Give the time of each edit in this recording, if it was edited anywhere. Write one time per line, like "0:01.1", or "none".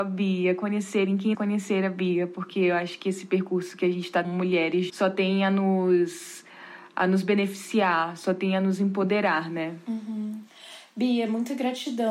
0:01.3
0:04.2
0:04.9